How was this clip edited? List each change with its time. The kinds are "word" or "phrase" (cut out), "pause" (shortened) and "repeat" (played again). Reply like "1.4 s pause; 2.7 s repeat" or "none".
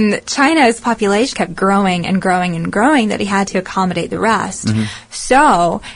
1.3 s word